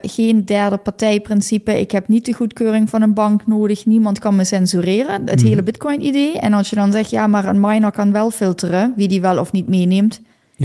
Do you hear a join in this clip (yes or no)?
no